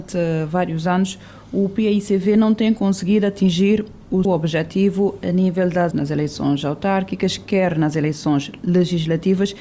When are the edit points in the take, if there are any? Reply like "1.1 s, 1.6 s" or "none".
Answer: 4.2 s, 5.9 s